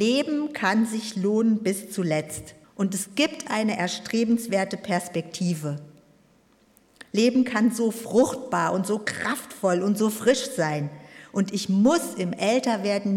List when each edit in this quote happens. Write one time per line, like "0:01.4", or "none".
0:02.6